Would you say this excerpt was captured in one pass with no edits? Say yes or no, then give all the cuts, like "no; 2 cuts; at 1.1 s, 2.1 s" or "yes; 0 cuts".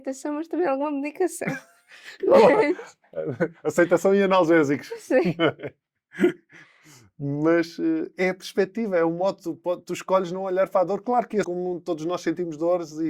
no; 1 cut; at 11.4 s